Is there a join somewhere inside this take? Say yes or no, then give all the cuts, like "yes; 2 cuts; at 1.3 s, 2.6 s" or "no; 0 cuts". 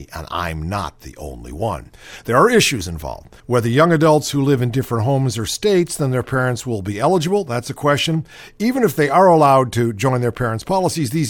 yes; 1 cut; at 3.4 s